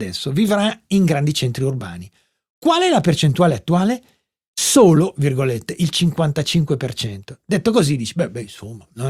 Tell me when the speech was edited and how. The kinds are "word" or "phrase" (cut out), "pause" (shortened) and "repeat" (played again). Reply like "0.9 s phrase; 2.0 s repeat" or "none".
none